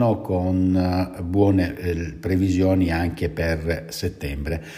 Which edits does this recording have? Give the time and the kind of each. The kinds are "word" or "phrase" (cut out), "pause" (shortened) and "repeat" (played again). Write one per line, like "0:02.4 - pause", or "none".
none